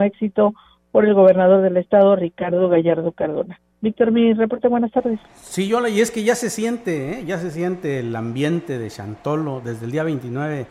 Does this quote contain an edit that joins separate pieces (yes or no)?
yes